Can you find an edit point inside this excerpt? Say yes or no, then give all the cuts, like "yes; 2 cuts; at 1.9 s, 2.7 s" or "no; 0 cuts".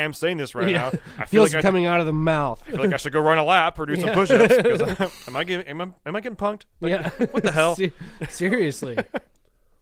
yes; 1 cut; at 1.6 s